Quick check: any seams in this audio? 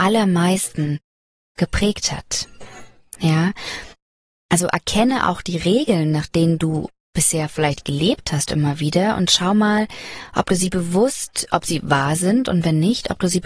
no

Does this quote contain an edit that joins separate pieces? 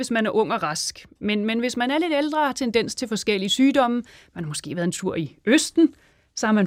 no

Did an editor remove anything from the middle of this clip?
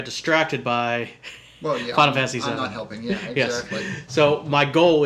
no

